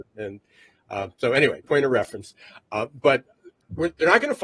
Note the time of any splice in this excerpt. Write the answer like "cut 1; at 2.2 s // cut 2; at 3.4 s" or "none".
cut 1; at 1.6 s

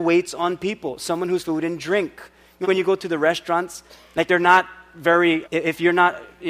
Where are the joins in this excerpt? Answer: cut 1; at 1.4 s // cut 2; at 2.6 s // cut 3; at 4.3 s // cut 4; at 5.4 s

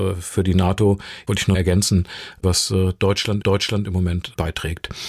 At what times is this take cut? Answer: cut 1; at 1.5 s // cut 2; at 2.4 s // cut 3; at 3.4 s

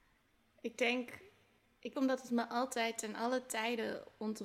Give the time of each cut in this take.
cut 1; at 1.9 s

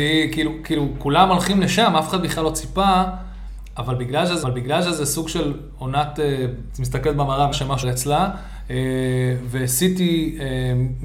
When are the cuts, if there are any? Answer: cut 1; at 4.4 s // cut 2; at 6.7 s // cut 3; at 7.5 s // cut 4; at 7.8 s

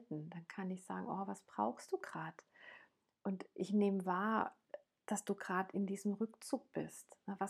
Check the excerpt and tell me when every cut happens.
none

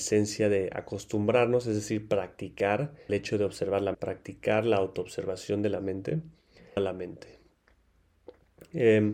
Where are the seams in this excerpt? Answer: cut 1; at 3.1 s // cut 2; at 3.9 s // cut 3; at 6.8 s

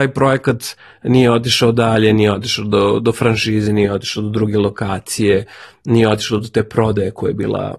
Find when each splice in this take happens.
none

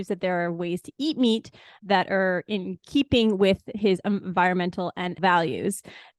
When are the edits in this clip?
cut 1; at 5.2 s

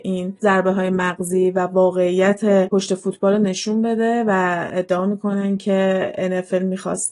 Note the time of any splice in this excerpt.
none

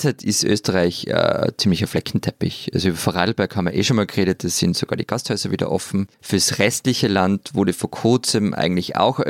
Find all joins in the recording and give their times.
cut 1; at 6.1 s

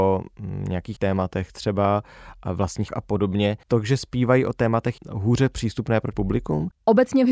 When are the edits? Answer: cut 1; at 1.0 s // cut 2; at 2.9 s // cut 3; at 3.6 s // cut 4; at 4.5 s // cut 5; at 5.0 s // cut 6; at 6.1 s

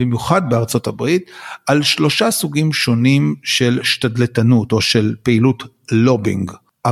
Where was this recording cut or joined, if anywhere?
none

